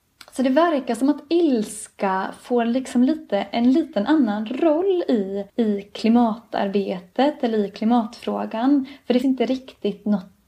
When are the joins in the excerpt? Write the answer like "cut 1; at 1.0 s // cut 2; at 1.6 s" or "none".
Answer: cut 1; at 5.5 s // cut 2; at 9.2 s